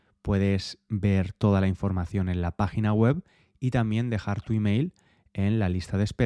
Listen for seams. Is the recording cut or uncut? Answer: uncut